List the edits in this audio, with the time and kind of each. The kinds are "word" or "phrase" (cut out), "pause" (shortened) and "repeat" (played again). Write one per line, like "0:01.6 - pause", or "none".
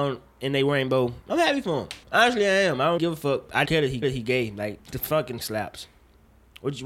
0:01.3 - phrase
0:02.0 - pause
0:03.0 - word
0:03.7 - word
0:04.0 - repeat
0:04.8 - word
0:05.4 - word

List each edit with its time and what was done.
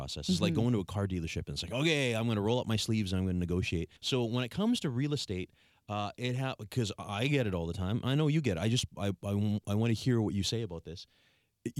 0:04.0 - pause

